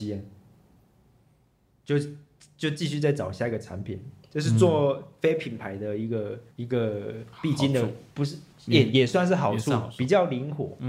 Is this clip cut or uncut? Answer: cut